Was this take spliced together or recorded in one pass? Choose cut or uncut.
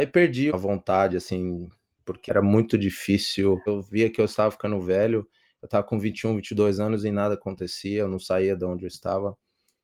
uncut